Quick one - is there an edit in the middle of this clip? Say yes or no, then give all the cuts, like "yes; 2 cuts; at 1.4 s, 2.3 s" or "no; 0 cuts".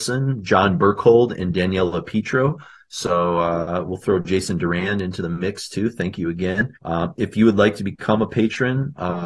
yes; 1 cut; at 6.8 s